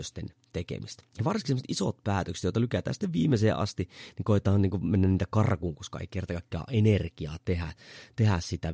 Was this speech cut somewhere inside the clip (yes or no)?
yes